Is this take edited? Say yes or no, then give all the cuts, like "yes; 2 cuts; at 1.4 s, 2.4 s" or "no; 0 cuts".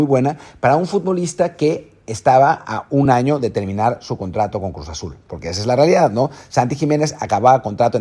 no; 0 cuts